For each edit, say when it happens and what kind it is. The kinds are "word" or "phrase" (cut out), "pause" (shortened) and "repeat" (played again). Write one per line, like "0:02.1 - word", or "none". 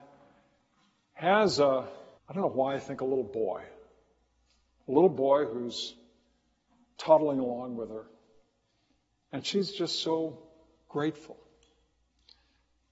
0:02.2 - pause